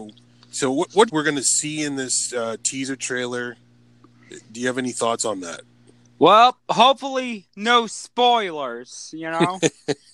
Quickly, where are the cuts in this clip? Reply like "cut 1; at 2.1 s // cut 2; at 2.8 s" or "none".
cut 1; at 1.1 s

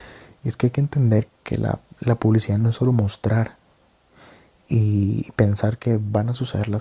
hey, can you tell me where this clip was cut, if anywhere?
cut 1; at 1.3 s

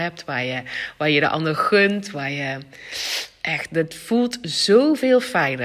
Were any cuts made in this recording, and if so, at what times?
none

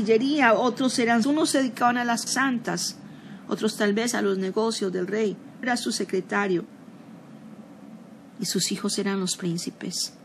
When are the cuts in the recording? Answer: cut 1; at 1.2 s // cut 2; at 2.3 s // cut 3; at 5.6 s

